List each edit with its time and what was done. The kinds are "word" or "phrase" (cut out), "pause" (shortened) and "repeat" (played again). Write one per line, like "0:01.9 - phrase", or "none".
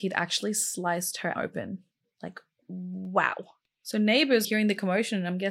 0:01.3 - word
0:04.4 - word